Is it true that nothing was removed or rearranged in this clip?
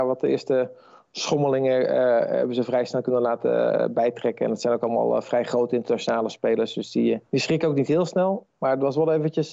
no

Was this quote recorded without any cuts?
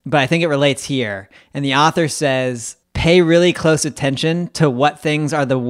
no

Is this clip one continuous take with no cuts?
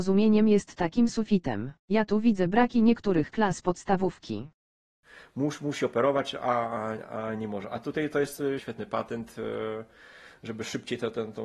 no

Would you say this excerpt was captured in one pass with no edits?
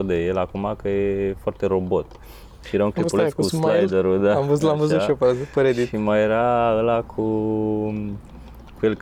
yes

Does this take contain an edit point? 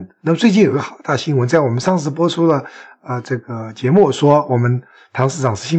no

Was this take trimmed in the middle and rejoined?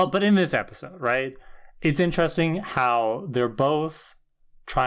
no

